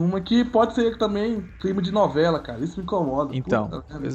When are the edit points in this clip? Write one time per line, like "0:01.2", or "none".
none